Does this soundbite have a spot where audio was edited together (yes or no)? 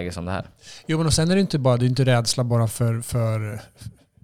no